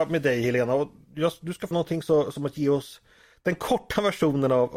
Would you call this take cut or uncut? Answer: cut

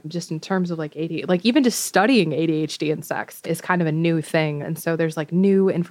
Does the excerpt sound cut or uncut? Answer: uncut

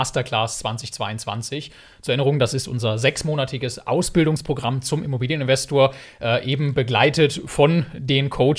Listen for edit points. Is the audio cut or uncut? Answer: uncut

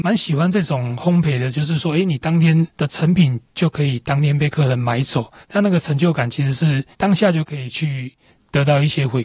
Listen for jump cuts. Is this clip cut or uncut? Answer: cut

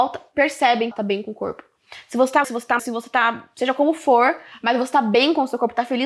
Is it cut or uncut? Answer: cut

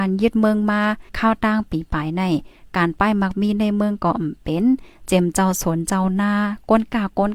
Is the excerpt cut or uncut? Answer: cut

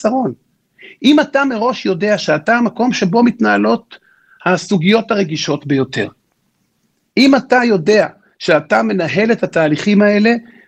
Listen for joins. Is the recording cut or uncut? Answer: uncut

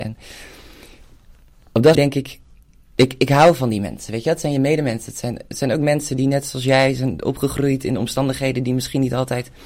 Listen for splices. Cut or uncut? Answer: cut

